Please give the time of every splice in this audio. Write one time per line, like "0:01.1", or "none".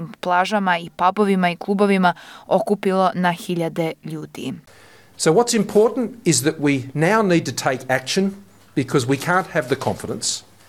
none